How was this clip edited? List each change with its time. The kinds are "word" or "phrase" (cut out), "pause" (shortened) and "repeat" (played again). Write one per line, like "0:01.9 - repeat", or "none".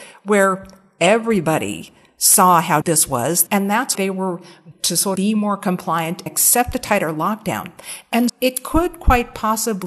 0:02.8 - word
0:03.9 - word
0:04.7 - word
0:05.1 - word
0:06.3 - word
0:08.3 - word